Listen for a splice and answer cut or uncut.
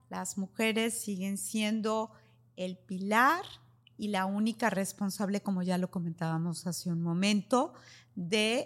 uncut